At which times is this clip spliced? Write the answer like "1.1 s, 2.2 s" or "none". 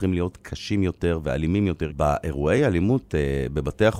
none